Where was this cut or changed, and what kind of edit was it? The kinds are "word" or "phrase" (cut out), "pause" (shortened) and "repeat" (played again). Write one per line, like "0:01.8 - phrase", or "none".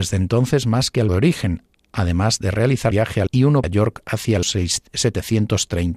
0:01.1 - word
0:02.9 - word
0:03.3 - word
0:03.6 - word
0:04.4 - word